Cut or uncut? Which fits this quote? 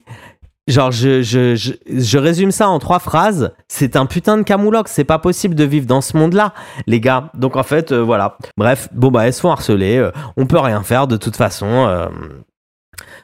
cut